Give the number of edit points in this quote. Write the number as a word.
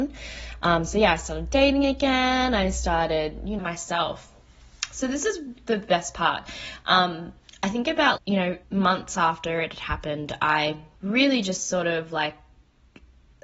four